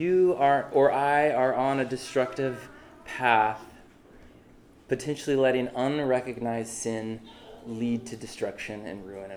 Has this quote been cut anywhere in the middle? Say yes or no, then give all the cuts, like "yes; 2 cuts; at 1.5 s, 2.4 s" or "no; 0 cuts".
no; 0 cuts